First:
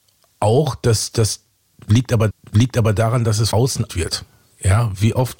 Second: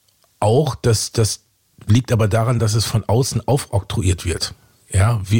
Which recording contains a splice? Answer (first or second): first